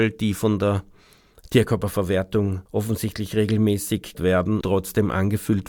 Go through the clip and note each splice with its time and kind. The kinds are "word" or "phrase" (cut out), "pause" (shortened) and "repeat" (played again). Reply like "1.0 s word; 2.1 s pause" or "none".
2.7 s pause; 4.1 s word; 4.6 s word